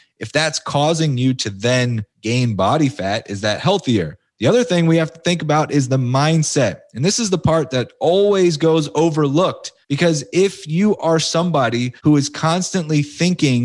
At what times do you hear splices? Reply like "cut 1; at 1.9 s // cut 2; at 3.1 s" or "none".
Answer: cut 1; at 2.1 s // cut 2; at 4.3 s // cut 3; at 9.8 s // cut 4; at 12.0 s